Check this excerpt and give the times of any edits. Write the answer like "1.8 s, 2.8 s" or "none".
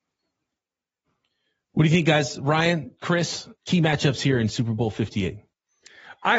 3.6 s